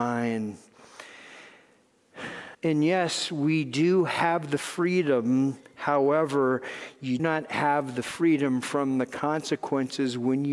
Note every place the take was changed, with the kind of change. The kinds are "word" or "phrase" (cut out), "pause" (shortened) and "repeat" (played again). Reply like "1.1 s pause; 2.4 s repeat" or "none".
2.5 s pause; 7.2 s word